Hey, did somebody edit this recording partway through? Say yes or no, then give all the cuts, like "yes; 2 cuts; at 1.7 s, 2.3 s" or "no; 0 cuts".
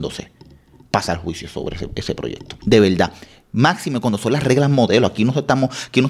no; 0 cuts